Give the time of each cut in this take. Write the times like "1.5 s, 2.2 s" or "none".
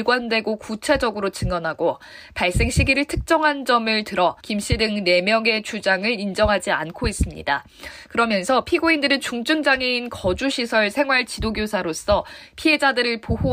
4.4 s